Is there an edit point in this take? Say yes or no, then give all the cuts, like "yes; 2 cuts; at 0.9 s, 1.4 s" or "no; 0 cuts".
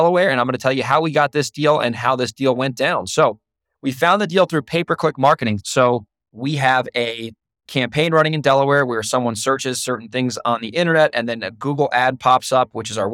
no; 0 cuts